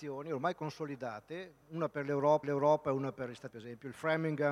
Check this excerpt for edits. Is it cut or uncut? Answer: cut